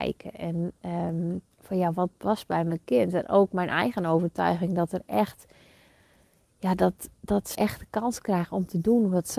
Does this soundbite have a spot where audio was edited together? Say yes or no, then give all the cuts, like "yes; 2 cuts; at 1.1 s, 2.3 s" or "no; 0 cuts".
yes; 2 cuts; at 1.5 s, 7.5 s